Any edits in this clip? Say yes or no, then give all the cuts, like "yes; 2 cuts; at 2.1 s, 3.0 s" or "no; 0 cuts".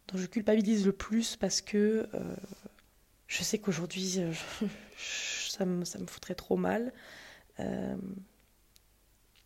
yes; 2 cuts; at 2.9 s, 4.9 s